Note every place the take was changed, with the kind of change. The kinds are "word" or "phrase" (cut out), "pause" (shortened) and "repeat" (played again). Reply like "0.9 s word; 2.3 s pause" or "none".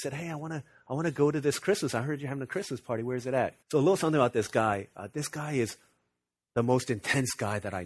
3.6 s pause